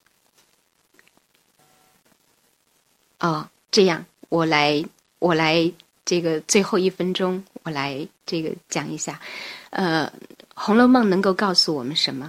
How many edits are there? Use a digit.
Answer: 2